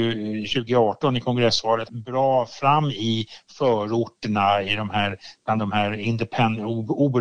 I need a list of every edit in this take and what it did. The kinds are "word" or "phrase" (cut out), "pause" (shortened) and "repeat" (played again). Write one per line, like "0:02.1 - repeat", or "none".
0:01.9 - phrase